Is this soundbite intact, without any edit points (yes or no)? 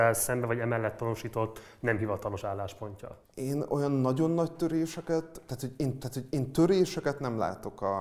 no